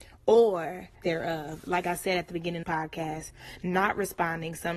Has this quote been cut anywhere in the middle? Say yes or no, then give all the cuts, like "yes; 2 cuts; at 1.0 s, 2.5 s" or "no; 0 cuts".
yes; 2 cuts; at 1.0 s, 2.6 s